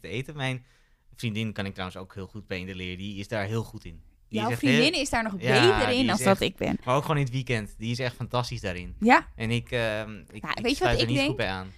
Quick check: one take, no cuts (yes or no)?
yes